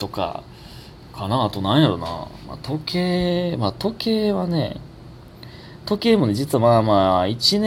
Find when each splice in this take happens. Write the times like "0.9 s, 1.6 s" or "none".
none